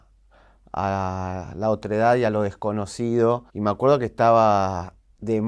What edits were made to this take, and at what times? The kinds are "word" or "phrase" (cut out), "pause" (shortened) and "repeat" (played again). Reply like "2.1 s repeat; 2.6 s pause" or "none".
3.5 s pause